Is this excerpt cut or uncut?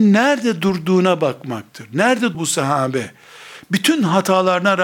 cut